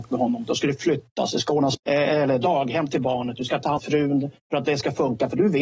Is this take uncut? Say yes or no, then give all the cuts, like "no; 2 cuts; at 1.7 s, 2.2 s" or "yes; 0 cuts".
no; 2 cuts; at 1.8 s, 3.8 s